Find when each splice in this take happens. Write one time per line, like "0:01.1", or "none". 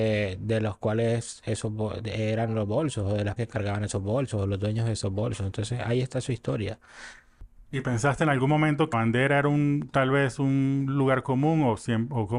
0:03.4
0:07.7
0:08.9